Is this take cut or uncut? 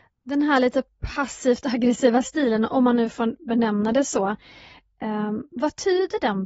uncut